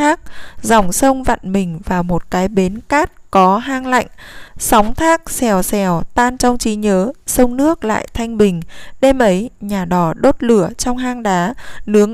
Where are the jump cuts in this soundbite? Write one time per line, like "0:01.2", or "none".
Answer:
0:04.5